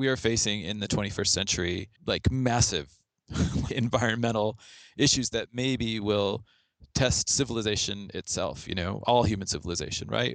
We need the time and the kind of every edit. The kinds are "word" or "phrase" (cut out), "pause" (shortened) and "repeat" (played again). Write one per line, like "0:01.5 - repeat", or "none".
0:02.0 - pause
0:03.7 - word

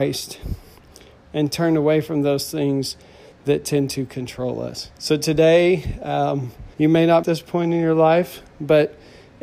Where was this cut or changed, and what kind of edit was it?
0:05.0 - pause
0:06.7 - pause
0:07.2 - phrase

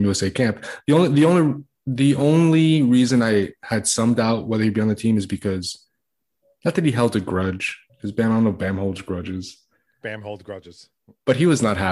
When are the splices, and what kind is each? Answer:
0:07.9 - pause

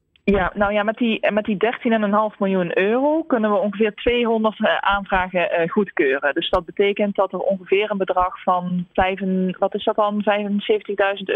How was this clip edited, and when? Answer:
none

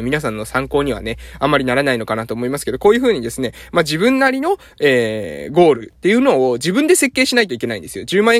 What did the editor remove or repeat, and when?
none

